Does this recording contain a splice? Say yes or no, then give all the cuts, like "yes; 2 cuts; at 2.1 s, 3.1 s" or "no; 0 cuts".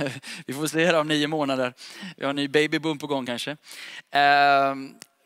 no; 0 cuts